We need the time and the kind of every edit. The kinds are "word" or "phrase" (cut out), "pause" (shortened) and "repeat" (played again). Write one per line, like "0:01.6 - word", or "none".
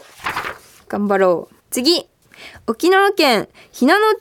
0:01.6 - pause